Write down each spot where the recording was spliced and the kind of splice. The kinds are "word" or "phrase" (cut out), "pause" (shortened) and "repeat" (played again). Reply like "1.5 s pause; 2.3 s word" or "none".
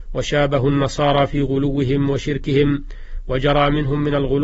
none